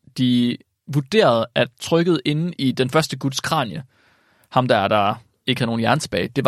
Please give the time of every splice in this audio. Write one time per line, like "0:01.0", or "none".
none